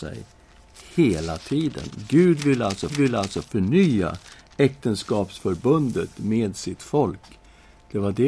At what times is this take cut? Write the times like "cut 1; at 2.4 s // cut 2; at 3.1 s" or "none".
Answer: cut 1; at 2.9 s